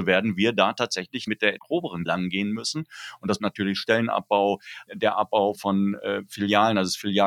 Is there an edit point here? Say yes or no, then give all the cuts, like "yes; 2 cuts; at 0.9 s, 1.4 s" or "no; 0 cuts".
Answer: yes; 6 cuts; at 1.3 s, 1.6 s, 2.1 s, 3.4 s, 4.9 s, 5.5 s